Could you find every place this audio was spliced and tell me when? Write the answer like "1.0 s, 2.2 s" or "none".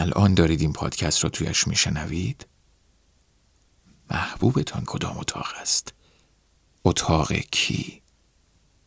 4.9 s